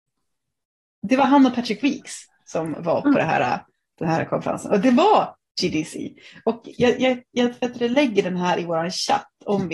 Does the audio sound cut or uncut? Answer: uncut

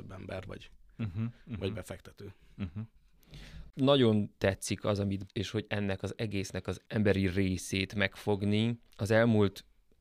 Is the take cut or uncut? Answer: cut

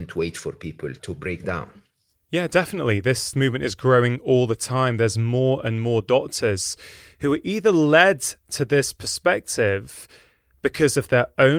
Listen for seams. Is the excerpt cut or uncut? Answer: cut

